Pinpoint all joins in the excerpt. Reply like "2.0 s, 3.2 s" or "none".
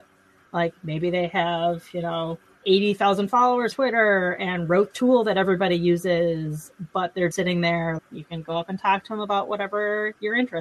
3.7 s, 4.9 s, 7.3 s, 8.0 s